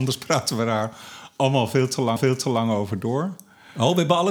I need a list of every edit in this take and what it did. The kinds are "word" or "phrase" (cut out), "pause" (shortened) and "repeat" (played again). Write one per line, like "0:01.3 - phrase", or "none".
0:02.2 - repeat